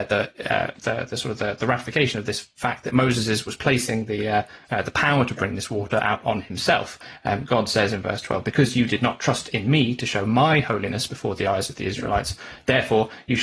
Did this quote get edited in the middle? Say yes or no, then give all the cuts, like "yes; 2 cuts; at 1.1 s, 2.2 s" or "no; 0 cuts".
yes; 1 cut; at 4.7 s